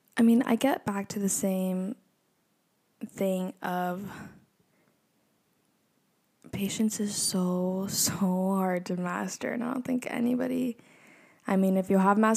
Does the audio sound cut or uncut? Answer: uncut